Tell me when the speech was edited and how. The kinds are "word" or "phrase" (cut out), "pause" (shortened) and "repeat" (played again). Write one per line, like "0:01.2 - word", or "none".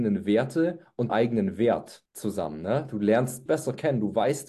0:01.1 - word
0:03.5 - word